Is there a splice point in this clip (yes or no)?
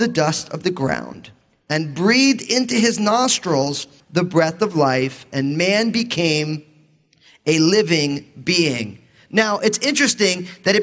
no